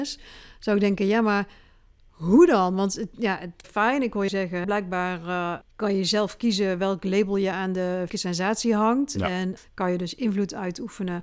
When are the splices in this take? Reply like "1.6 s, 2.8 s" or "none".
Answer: 3.6 s, 4.3 s, 4.6 s, 5.6 s, 8.1 s, 9.6 s